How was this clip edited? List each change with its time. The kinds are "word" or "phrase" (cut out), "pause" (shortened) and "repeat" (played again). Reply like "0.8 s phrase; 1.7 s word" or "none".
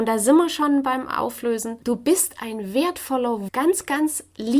1.8 s pause; 3.5 s word